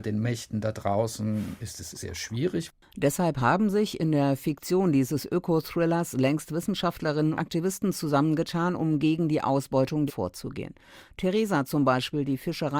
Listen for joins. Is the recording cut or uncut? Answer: cut